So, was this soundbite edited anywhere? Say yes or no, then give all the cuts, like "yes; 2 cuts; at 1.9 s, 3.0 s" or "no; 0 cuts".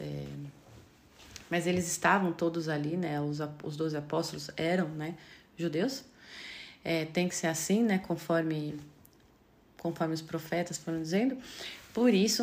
no; 0 cuts